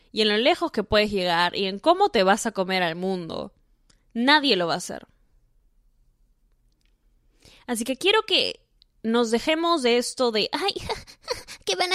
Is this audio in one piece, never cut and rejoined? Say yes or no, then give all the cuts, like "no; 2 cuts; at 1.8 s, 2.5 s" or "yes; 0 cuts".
yes; 0 cuts